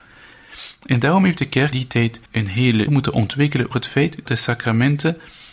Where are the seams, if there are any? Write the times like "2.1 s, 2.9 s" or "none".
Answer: 1.7 s, 2.3 s, 2.9 s, 3.7 s, 4.3 s